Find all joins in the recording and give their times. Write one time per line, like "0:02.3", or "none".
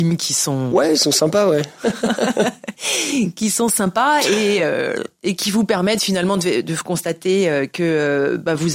none